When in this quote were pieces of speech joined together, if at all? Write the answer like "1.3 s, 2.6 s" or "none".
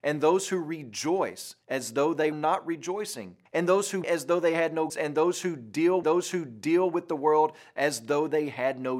1.6 s, 2.3 s, 3.5 s, 4.0 s, 4.9 s, 6.0 s